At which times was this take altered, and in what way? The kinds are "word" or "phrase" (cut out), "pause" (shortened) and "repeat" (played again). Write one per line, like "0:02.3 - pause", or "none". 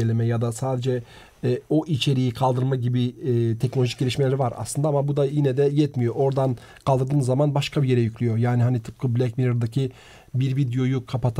none